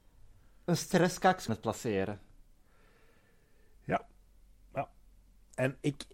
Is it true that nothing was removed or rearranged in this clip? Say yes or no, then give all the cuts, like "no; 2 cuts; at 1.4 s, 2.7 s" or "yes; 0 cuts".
no; 1 cut; at 1.5 s